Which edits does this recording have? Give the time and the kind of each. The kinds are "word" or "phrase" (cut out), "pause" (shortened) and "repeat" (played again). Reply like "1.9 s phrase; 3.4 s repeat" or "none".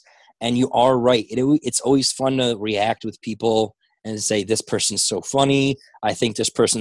none